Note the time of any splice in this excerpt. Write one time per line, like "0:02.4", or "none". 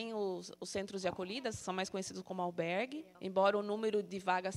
0:03.1